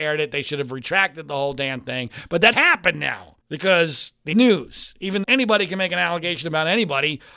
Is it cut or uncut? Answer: cut